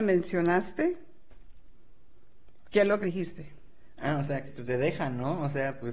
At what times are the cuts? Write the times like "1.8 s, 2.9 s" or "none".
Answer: 3.0 s, 4.4 s